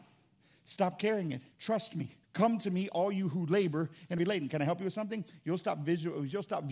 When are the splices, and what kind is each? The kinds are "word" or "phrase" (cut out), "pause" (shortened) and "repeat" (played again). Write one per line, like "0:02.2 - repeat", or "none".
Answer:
0:01.5 - pause
0:02.2 - pause
0:04.2 - word